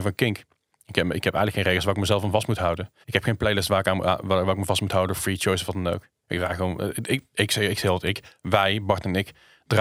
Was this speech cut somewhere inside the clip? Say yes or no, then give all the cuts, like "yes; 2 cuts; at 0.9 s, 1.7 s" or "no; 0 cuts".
yes; 1 cut; at 3.0 s